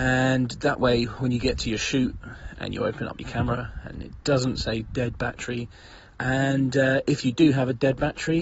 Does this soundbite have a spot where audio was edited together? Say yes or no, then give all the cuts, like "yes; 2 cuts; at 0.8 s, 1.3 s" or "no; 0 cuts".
no; 0 cuts